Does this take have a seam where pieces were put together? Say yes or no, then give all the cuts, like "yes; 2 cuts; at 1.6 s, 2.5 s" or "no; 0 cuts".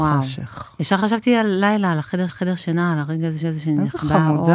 yes; 2 cuts; at 2.3 s, 3.4 s